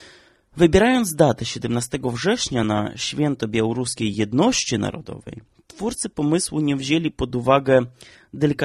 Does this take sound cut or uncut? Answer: uncut